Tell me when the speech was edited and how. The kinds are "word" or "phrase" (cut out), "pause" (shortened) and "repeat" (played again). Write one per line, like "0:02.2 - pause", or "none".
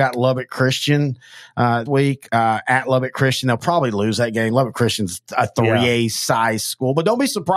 0:01.9 - word